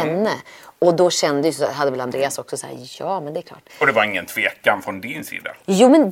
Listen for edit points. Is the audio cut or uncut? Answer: cut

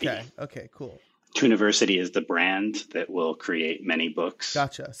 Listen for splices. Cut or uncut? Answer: uncut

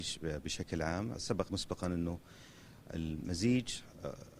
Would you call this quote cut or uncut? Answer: cut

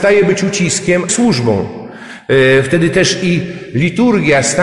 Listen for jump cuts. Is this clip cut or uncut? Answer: cut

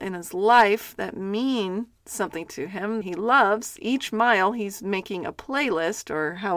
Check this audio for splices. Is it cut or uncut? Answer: cut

